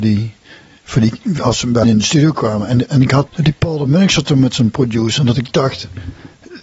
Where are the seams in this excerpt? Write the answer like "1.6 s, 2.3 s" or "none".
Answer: 1.8 s, 2.9 s, 3.3 s